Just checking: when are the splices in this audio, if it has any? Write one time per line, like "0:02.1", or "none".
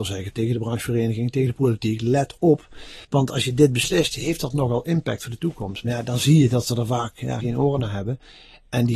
0:03.0
0:07.4